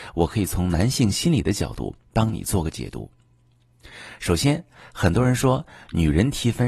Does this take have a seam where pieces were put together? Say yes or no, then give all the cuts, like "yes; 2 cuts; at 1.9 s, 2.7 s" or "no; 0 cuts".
no; 0 cuts